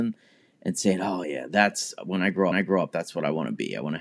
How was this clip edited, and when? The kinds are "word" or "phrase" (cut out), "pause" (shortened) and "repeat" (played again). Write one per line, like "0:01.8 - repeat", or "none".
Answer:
0:01.2 - word
0:02.5 - repeat